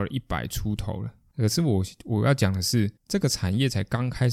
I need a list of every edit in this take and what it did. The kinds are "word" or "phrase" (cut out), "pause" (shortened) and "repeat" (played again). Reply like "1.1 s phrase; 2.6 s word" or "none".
3.0 s pause

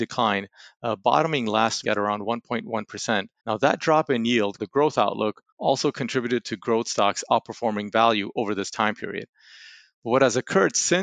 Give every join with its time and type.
1.8 s word; 3.4 s pause; 4.6 s phrase; 5.5 s pause

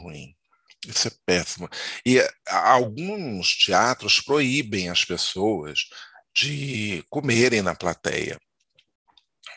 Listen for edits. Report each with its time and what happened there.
none

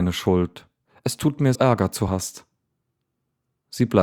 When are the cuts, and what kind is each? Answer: 1.6 s phrase; 2.1 s word

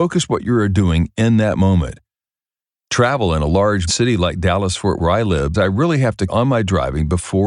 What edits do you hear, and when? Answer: 3.9 s word; 5.0 s word; 5.5 s word; 6.3 s word

